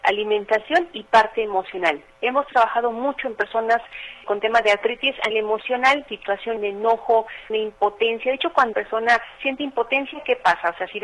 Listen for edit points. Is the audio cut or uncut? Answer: cut